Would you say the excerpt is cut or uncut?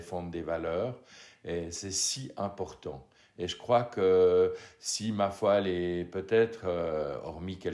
uncut